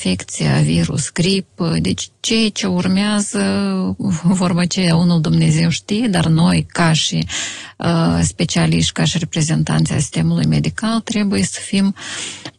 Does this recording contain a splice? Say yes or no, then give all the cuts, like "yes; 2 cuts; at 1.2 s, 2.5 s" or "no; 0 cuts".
no; 0 cuts